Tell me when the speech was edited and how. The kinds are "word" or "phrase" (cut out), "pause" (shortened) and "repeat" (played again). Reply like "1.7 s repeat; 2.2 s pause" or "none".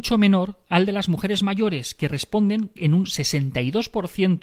none